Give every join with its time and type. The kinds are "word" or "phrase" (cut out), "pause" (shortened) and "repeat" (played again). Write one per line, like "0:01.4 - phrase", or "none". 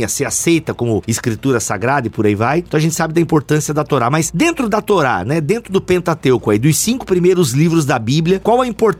none